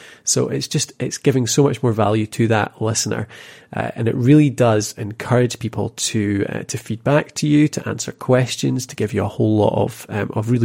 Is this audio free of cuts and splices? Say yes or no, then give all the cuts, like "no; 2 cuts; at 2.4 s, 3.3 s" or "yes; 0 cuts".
yes; 0 cuts